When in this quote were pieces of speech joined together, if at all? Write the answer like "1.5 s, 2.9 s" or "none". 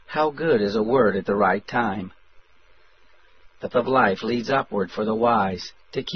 3.7 s